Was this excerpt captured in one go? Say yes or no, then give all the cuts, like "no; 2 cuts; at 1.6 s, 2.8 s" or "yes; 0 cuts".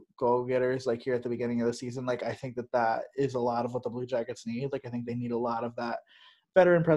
yes; 0 cuts